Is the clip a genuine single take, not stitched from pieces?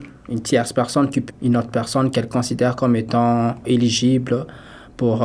no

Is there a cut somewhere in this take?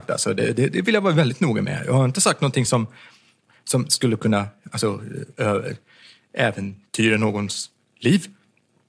no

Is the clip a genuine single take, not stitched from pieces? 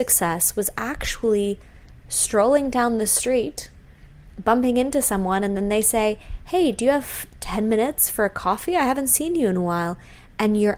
yes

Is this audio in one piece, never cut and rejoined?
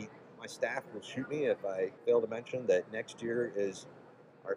no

